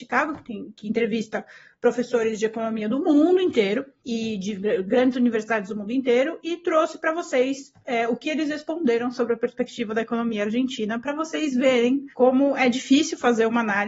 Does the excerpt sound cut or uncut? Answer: uncut